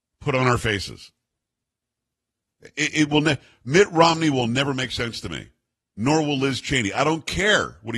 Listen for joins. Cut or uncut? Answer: uncut